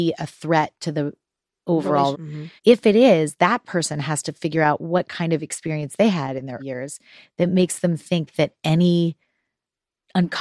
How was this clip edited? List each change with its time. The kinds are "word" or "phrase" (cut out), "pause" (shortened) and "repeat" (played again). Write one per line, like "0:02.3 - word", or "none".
0:02.1 - word
0:02.6 - pause
0:06.6 - word